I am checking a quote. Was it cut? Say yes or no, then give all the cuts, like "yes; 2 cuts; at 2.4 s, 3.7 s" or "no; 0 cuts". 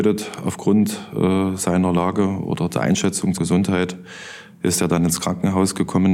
yes; 1 cut; at 3.4 s